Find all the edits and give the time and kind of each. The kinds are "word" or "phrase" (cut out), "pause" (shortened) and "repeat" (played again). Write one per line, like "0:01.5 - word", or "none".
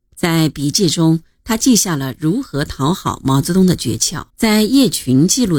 0:04.3 - pause